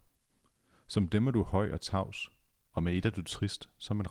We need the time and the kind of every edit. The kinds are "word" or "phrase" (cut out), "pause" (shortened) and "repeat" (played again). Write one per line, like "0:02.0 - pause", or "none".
none